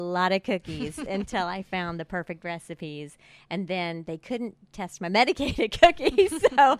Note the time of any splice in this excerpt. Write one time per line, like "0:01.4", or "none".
none